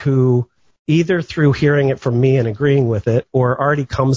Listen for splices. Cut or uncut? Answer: uncut